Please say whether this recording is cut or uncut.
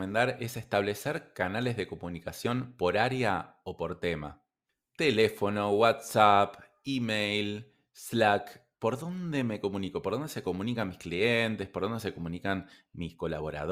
uncut